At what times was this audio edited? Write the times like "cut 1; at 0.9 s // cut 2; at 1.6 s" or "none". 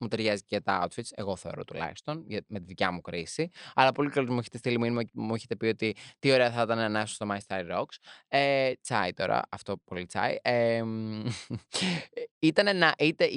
cut 1; at 5.1 s